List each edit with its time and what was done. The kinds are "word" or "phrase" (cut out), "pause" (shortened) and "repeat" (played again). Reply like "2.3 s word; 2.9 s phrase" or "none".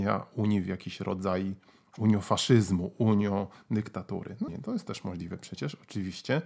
4.5 s word